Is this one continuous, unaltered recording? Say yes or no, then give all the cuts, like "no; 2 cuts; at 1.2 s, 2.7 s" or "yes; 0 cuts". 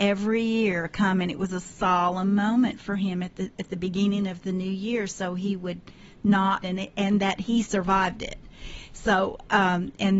no; 1 cut; at 6.6 s